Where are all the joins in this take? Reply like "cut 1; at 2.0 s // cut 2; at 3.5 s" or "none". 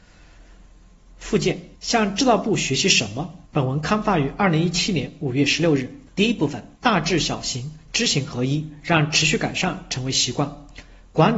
cut 1; at 1.7 s // cut 2; at 3.4 s // cut 3; at 6.1 s // cut 4; at 6.7 s